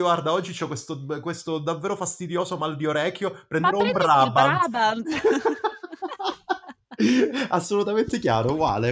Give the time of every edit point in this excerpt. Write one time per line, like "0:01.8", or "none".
none